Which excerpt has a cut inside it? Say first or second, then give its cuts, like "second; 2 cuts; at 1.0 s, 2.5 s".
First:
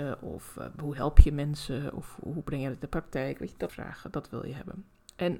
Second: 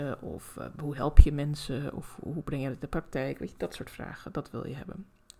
first; 1 cut; at 3.7 s